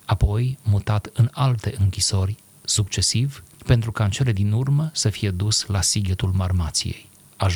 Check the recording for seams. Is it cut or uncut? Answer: cut